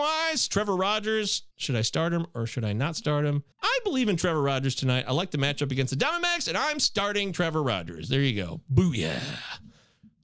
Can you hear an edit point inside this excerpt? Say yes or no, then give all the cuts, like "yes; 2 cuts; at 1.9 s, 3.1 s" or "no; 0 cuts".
yes; 2 cuts; at 1.5 s, 3.5 s